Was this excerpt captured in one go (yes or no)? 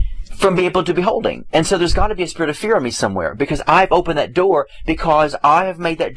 yes